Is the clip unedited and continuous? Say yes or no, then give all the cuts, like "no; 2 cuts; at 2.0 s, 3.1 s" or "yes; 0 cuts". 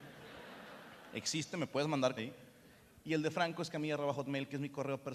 no; 1 cut; at 2.2 s